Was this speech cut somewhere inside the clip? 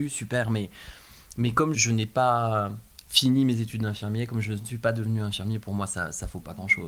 yes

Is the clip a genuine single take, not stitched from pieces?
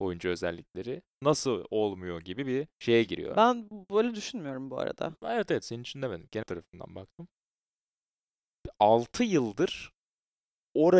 no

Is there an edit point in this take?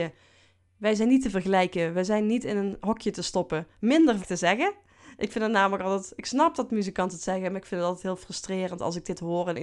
yes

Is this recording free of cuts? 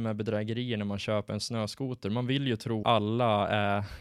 no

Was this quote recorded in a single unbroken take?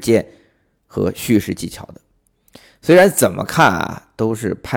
yes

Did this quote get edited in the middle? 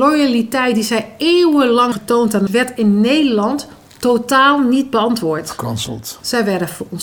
yes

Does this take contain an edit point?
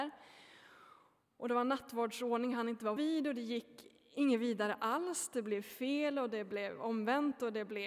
yes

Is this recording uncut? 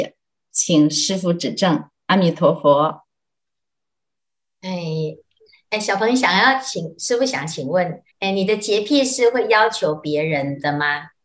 no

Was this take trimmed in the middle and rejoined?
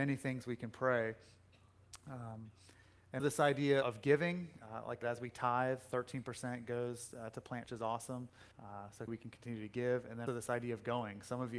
yes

